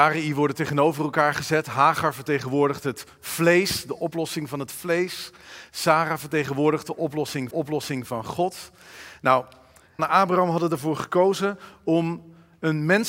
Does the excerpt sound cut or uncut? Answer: cut